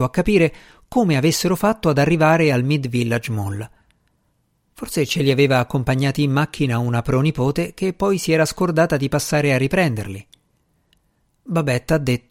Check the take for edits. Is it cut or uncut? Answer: uncut